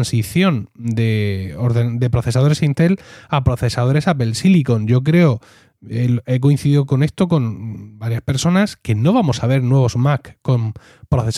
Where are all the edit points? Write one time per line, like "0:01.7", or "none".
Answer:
none